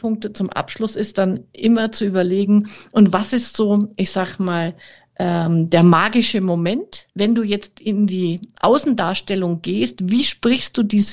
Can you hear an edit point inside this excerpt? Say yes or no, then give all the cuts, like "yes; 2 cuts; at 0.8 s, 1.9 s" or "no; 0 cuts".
yes; 1 cut; at 7.1 s